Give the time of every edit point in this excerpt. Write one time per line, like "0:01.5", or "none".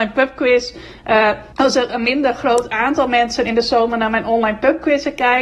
0:01.5